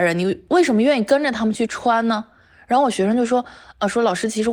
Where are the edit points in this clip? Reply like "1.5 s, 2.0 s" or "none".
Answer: none

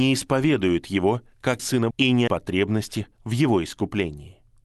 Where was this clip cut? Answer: 1.6 s, 1.9 s, 2.3 s

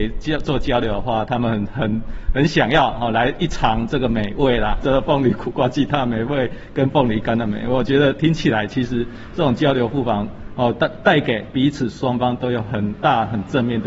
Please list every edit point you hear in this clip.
4.8 s

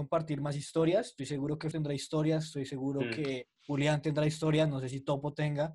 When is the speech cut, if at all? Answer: 1.2 s, 1.7 s, 3.6 s

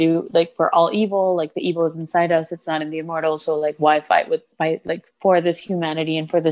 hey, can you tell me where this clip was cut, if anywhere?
5.1 s

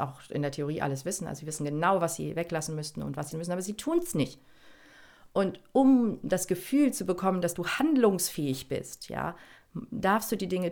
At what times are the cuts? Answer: 3.3 s

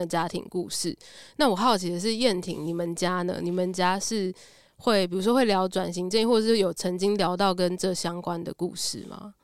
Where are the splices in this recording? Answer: none

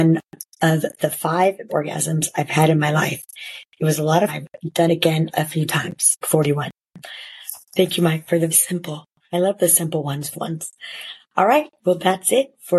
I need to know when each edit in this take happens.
1.7 s, 4.3 s, 4.9 s, 6.2 s, 8.5 s, 9.1 s, 10.3 s

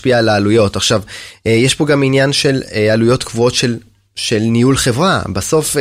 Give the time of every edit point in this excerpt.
none

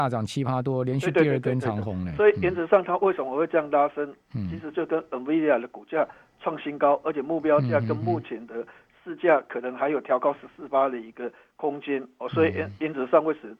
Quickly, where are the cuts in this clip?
none

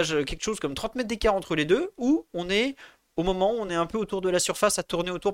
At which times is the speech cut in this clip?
none

